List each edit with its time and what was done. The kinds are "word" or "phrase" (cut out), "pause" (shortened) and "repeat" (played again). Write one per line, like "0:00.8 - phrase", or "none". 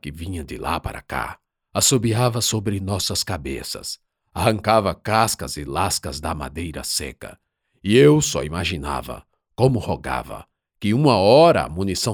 none